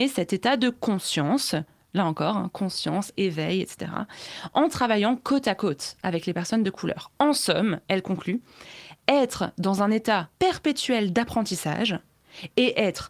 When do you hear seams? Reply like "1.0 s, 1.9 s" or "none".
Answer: 10.3 s